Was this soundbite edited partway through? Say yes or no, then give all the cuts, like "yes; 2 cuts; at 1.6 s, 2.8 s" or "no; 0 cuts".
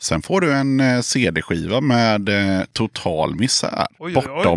no; 0 cuts